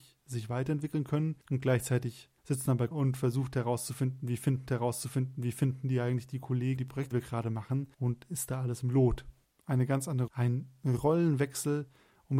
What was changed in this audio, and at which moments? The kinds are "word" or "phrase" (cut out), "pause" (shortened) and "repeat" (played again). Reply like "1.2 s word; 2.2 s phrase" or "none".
1.4 s pause; 2.4 s pause; 2.9 s word; 4.7 s repeat; 6.8 s word; 7.1 s word; 7.9 s pause; 10.3 s word